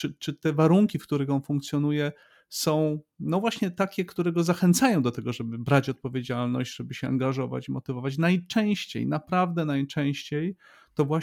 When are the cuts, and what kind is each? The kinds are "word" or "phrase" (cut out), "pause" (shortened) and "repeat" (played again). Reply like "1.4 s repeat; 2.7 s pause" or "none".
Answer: none

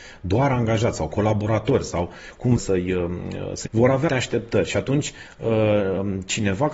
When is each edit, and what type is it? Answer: 2.6 s phrase; 3.7 s word; 4.1 s word

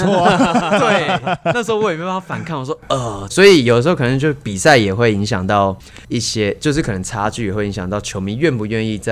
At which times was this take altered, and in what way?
3.3 s word

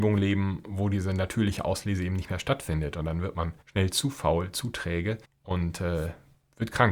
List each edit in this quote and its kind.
3.6 s pause; 5.2 s pause

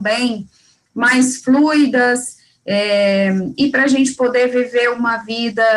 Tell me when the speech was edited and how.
none

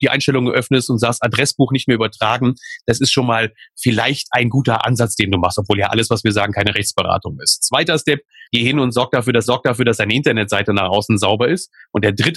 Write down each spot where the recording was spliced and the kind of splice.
8.5 s pause; 9.4 s repeat

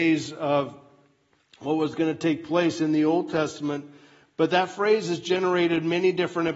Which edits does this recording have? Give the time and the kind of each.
none

